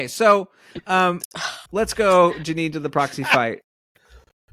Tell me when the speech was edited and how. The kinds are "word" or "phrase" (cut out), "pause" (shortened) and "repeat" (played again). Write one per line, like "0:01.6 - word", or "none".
0:01.7 - pause